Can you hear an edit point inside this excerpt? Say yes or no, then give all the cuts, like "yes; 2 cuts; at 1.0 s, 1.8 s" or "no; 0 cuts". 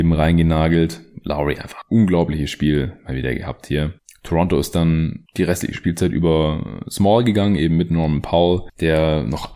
no; 0 cuts